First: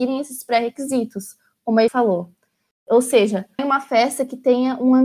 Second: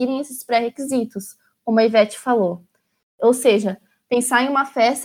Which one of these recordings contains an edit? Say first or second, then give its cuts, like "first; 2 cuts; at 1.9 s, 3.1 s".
first; 2 cuts; at 1.9 s, 3.6 s